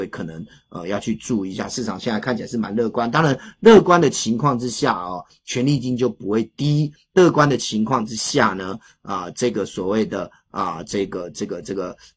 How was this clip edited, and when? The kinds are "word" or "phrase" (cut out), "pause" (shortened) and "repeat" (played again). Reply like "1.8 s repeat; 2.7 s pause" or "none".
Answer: none